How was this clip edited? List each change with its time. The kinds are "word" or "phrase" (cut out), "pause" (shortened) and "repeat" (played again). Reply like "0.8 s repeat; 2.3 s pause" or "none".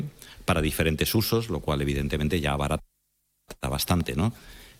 none